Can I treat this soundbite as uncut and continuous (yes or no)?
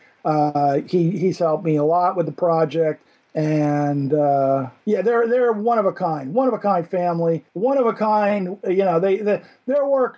no